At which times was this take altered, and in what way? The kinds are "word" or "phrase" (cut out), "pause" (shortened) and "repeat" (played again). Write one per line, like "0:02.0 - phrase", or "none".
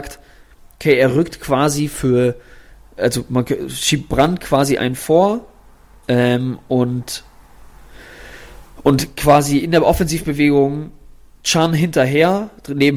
none